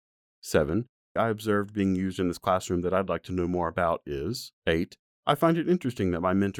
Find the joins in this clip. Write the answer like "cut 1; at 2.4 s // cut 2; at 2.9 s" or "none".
cut 1; at 1.2 s // cut 2; at 4.6 s

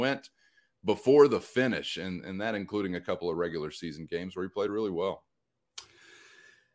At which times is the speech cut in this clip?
none

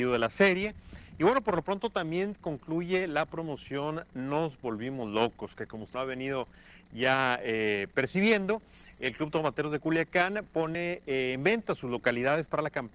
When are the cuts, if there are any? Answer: cut 1; at 5.9 s

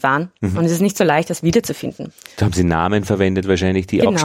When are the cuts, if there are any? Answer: none

